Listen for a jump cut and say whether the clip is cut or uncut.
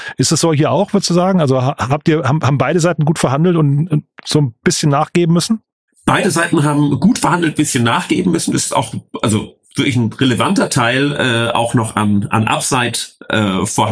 uncut